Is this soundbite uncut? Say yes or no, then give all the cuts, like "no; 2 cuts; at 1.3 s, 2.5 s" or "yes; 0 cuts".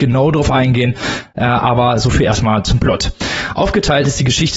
yes; 0 cuts